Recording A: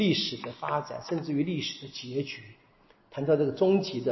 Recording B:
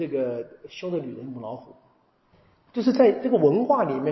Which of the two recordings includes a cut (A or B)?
B